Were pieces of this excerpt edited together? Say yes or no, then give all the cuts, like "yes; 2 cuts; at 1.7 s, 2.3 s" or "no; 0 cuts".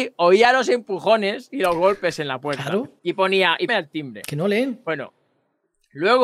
yes; 2 cuts; at 3.0 s, 3.7 s